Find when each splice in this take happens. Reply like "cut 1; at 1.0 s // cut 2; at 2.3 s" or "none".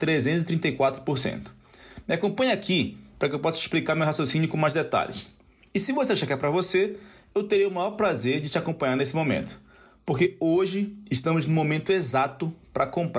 none